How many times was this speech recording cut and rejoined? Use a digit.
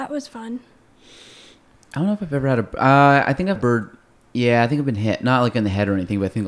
1